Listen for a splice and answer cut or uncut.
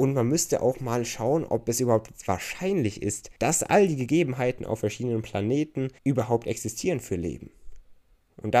cut